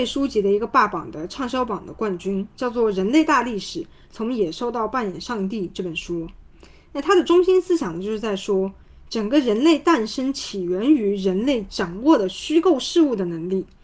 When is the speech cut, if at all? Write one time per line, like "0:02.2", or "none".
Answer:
none